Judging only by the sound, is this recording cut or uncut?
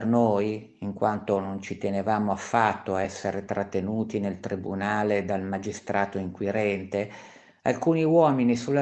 uncut